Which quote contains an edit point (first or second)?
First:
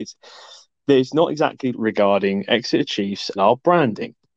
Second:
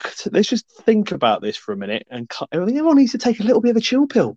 first